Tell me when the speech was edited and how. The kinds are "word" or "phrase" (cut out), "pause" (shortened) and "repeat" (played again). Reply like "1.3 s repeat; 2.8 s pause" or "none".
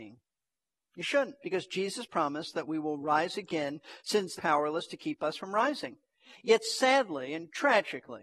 4.4 s phrase